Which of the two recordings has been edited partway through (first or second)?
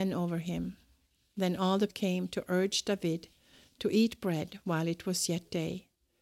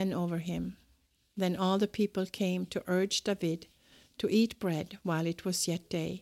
first